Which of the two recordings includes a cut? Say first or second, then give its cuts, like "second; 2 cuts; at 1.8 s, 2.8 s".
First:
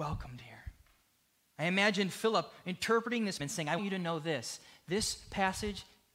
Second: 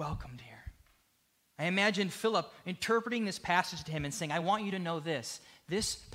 first; 2 cuts; at 3.4 s, 3.8 s